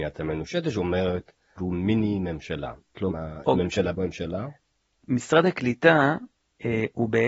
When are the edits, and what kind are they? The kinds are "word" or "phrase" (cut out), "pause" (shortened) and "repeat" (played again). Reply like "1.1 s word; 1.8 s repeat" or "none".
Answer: 1.6 s word; 3.1 s word; 3.4 s word; 3.9 s word

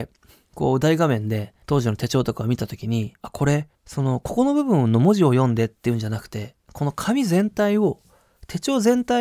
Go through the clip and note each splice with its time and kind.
1.6 s pause; 3.2 s pause; 3.7 s pause

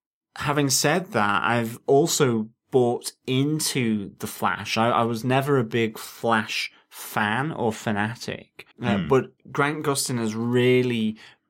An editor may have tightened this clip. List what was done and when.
8.7 s pause; 9.4 s pause

